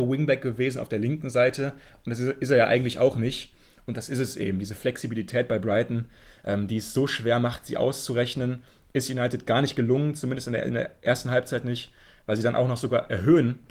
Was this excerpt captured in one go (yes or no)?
yes